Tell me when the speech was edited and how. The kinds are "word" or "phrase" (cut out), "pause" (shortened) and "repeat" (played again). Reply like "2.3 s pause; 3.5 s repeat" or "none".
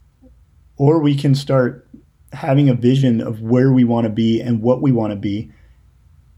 2.0 s pause